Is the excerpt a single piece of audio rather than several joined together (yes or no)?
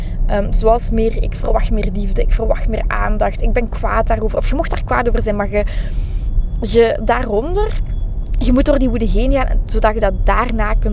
yes